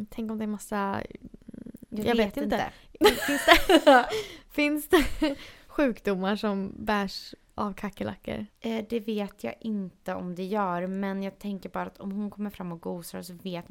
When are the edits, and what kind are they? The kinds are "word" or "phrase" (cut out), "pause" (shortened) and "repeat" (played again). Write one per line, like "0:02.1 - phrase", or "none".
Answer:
0:08.5 - pause